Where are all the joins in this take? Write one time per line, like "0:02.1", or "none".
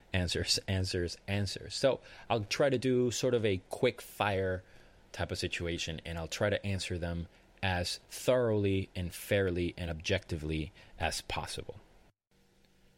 none